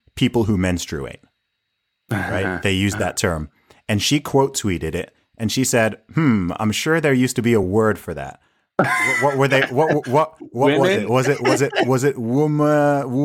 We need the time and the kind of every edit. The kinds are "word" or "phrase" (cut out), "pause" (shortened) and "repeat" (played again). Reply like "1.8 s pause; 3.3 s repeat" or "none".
none